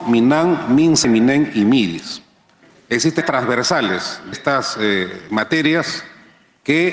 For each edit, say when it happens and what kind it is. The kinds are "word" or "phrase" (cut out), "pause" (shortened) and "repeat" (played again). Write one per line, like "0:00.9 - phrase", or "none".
0:01.0 - word
0:03.2 - word
0:04.3 - word